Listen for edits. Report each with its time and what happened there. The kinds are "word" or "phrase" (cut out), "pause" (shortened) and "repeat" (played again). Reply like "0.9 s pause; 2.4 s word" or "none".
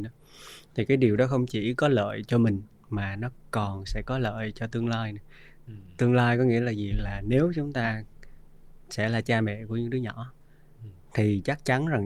none